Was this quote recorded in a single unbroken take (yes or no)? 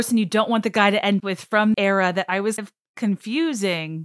no